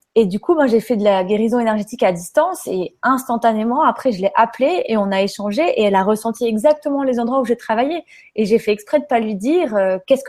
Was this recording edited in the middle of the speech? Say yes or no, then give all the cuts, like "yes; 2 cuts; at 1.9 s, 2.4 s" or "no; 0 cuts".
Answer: no; 0 cuts